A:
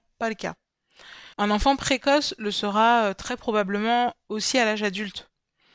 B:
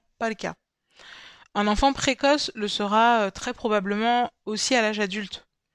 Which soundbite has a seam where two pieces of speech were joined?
A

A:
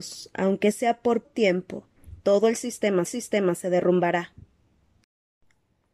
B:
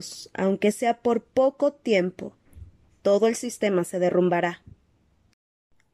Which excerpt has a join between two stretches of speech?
A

